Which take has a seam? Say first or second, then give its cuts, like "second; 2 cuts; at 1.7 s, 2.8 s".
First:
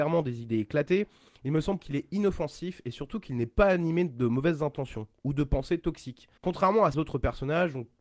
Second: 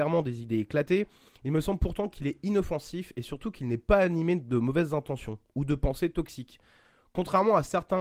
first; 3 cuts; at 1.8 s, 6.4 s, 6.9 s